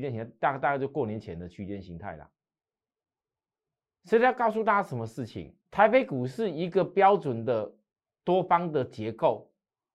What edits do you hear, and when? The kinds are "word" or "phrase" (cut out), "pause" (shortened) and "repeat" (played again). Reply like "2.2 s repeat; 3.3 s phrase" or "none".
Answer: 5.6 s pause